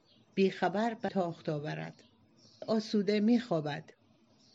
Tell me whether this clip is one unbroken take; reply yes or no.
no